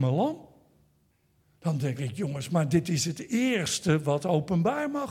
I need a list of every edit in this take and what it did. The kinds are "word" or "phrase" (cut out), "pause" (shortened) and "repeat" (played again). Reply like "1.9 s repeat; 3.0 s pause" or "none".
none